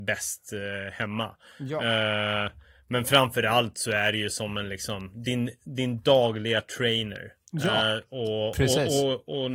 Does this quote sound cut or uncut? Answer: uncut